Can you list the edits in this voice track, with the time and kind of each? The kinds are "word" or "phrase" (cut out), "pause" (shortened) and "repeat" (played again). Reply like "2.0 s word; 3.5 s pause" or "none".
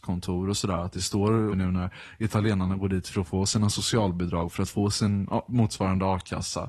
1.5 s phrase